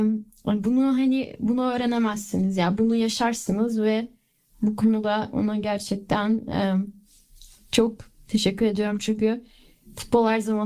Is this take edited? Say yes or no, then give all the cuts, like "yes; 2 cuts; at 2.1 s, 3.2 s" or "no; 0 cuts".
no; 0 cuts